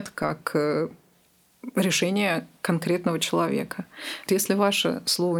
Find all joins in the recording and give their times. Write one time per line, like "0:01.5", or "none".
0:04.3